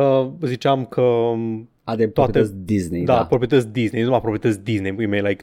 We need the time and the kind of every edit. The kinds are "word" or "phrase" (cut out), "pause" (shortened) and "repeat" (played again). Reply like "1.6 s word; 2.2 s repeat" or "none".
none